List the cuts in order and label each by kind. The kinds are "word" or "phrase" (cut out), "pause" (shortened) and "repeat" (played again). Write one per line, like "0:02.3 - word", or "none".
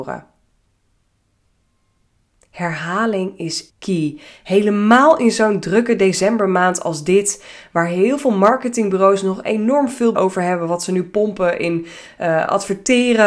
0:03.7 - word
0:10.1 - word

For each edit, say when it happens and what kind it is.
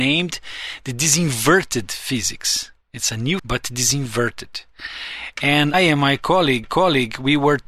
0:03.4 - word
0:05.7 - word
0:06.6 - repeat

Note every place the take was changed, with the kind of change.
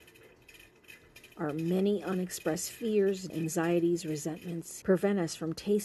0:03.3 - word
0:04.8 - phrase

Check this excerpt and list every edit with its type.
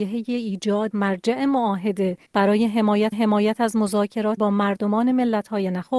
0:00.9 - word
0:02.3 - pause
0:03.1 - repeat
0:04.4 - word

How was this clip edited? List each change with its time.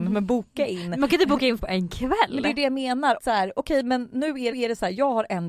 0:01.6 - word
0:03.2 - phrase
0:04.5 - repeat

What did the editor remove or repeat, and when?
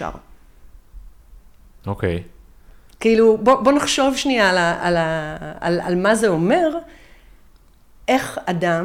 none

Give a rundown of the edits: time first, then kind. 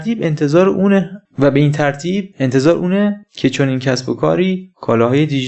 none

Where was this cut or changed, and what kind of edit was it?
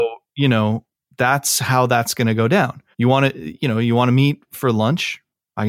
0:02.9 - pause

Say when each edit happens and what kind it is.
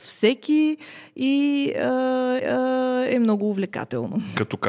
0:02.4 - repeat

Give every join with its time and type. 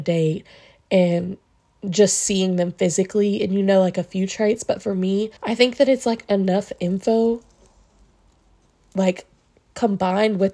0:05.4 - pause

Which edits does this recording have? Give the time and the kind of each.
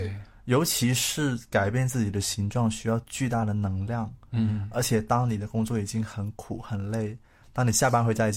none

